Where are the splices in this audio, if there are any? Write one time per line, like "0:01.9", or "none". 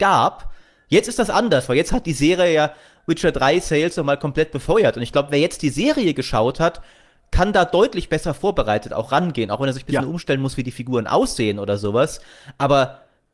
none

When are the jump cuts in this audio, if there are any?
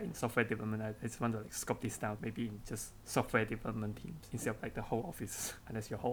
0:02.2

